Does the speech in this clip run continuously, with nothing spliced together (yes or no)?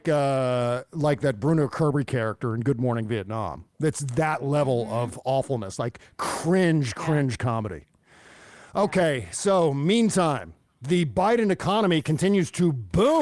yes